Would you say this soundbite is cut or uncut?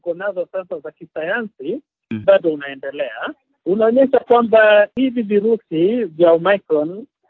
cut